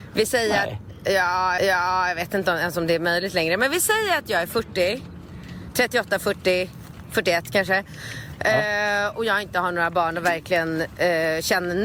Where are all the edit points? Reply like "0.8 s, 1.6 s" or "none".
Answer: 1.6 s, 9.1 s